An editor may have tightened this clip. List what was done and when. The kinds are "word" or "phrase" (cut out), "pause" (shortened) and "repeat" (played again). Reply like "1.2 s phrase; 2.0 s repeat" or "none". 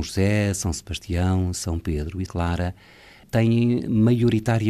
2.3 s word